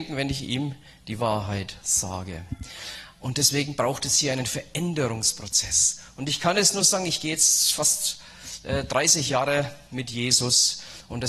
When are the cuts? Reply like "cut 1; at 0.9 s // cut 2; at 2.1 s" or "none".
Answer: none